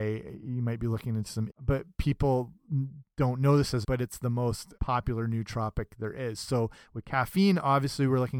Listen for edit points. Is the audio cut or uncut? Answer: cut